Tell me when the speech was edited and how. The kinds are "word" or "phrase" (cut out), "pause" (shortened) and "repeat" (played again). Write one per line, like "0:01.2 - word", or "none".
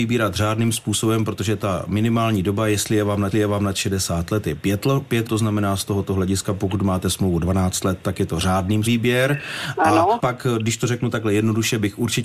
0:03.3 - repeat
0:05.3 - word
0:08.9 - word
0:10.2 - word